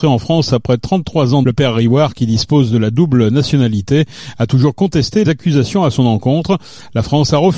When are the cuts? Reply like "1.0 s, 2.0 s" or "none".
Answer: 1.4 s, 5.2 s